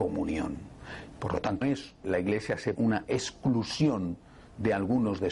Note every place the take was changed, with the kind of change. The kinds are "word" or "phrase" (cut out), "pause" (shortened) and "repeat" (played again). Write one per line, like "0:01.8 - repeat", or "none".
0:01.6 - word
0:02.0 - word
0:02.7 - word